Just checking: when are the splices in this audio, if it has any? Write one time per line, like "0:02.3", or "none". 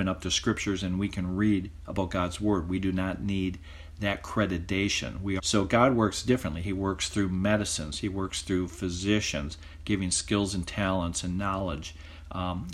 0:05.4